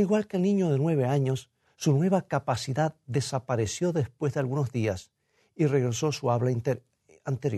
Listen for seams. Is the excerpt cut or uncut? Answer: uncut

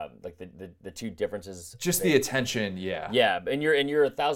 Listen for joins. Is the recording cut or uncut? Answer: uncut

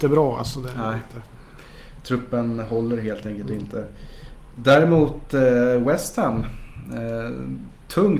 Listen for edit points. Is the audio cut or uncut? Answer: uncut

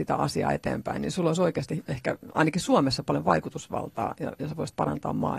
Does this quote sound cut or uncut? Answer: uncut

